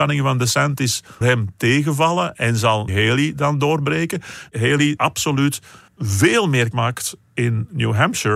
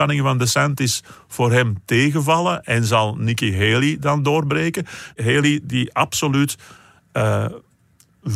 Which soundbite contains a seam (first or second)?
first